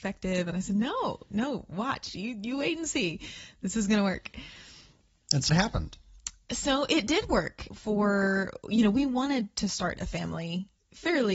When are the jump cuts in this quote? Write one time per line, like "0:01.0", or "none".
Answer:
0:05.5
0:07.7